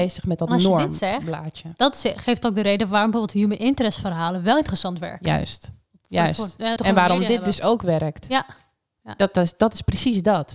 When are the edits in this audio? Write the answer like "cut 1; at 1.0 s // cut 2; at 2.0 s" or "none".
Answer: cut 1; at 6.8 s